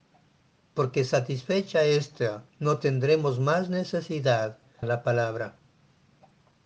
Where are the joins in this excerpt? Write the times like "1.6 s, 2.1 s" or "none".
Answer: 2.5 s, 4.8 s